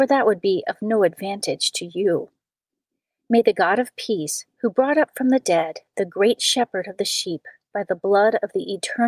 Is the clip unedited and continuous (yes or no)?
yes